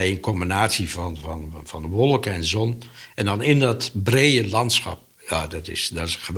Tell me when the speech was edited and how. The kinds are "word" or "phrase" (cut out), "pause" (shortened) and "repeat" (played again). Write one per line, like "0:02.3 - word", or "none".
none